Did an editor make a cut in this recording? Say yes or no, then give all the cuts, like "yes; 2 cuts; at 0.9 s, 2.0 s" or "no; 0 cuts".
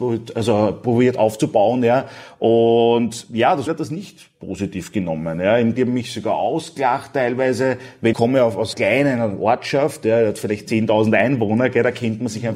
yes; 4 cuts; at 3.7 s, 5.8 s, 8.1 s, 8.7 s